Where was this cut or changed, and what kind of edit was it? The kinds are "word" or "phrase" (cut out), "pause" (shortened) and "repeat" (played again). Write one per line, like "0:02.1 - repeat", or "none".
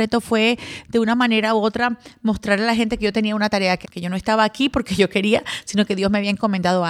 0:03.8 - word